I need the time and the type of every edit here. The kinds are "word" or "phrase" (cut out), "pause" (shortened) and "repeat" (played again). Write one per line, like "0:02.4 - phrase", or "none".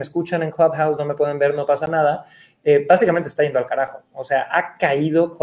none

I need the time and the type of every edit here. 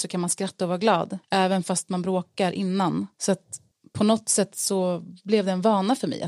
0:01.2 - pause
0:03.1 - pause
0:03.7 - pause

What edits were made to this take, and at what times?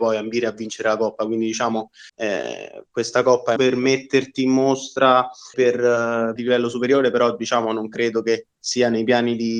0:02.1 - pause
0:03.6 - phrase
0:05.5 - word
0:06.4 - phrase

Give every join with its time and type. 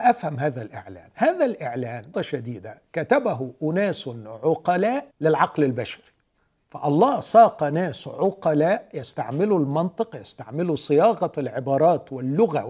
0:02.1 - word
0:05.1 - pause
0:06.4 - pause

